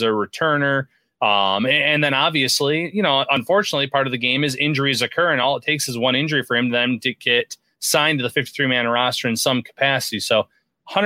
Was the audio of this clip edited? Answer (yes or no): no